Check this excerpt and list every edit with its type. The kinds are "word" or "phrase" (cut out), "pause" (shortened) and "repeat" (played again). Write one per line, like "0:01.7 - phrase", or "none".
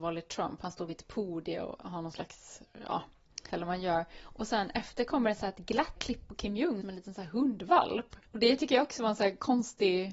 0:01.8 - word
0:03.5 - word
0:06.0 - word
0:06.8 - phrase
0:08.2 - pause